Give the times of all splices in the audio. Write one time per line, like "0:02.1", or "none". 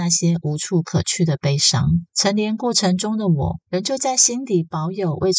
0:02.1
0:03.6